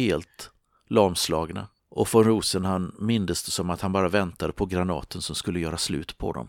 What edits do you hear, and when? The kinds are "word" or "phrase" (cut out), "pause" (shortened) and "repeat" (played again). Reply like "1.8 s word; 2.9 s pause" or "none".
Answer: 1.8 s pause